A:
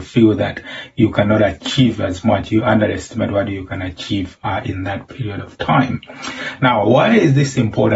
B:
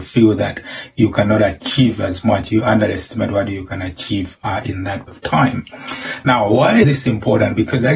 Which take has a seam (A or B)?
B